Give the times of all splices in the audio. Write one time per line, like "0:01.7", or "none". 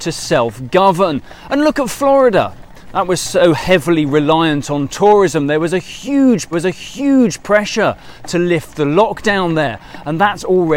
0:06.5